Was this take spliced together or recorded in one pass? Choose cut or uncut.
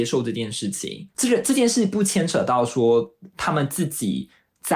cut